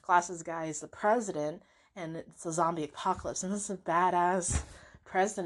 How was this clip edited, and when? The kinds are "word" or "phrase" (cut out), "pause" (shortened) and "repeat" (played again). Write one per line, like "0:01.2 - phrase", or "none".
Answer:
none